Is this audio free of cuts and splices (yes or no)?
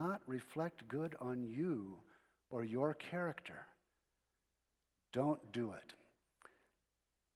yes